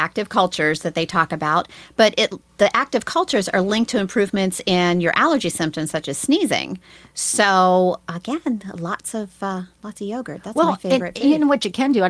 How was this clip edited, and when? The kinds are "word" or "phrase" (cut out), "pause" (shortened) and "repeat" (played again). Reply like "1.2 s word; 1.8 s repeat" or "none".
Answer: 2.5 s pause